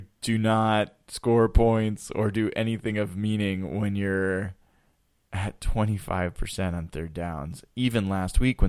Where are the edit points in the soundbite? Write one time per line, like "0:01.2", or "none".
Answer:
none